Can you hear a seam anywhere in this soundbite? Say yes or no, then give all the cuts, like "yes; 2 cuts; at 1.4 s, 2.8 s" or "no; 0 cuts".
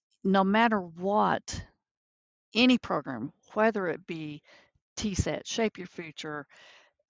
no; 0 cuts